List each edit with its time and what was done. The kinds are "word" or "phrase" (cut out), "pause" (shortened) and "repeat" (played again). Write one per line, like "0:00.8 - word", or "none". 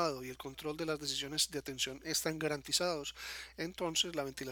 none

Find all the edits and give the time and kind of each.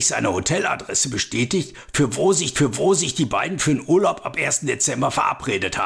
0:02.5 - repeat

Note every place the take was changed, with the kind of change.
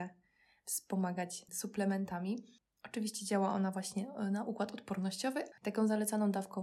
none

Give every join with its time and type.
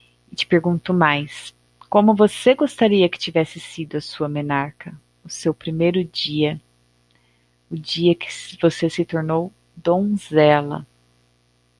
none

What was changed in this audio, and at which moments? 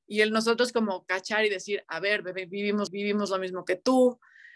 0:02.9 - repeat

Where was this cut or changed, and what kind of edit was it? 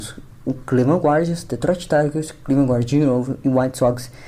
none

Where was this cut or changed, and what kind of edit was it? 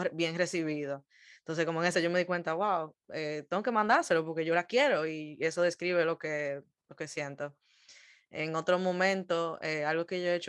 0:01.9 - word

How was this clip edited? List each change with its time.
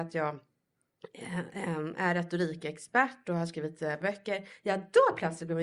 0:04.0 - word

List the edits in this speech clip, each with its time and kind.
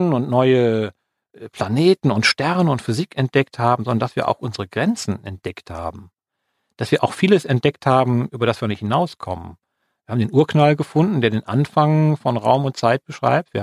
none

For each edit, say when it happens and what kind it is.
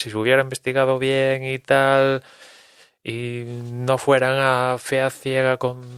none

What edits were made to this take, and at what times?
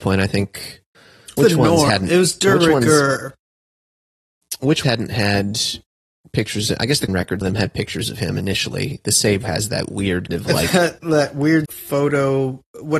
0:01.4 - word
0:04.8 - word
0:07.1 - word
0:07.4 - word
0:09.4 - word
0:10.3 - word
0:11.6 - word

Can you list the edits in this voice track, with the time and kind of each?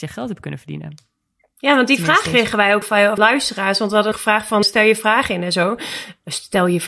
0:02.8 - word
0:03.2 - word
0:04.1 - word
0:04.6 - word

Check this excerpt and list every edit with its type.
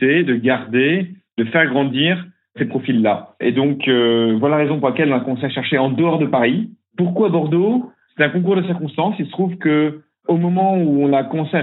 none

